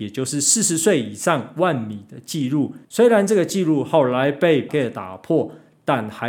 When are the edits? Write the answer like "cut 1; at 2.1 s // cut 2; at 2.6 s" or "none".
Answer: cut 1; at 2.8 s // cut 2; at 4.7 s